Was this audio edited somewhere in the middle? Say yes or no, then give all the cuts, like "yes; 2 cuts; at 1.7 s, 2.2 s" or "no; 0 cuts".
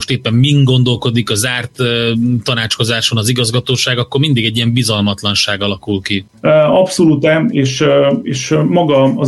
no; 0 cuts